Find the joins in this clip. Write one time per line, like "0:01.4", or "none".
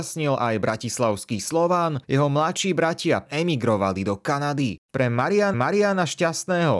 0:02.0
0:03.3
0:04.8
0:05.5